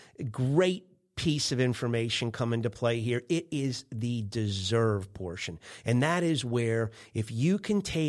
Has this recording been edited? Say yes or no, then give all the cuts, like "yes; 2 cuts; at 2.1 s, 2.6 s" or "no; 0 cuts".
no; 0 cuts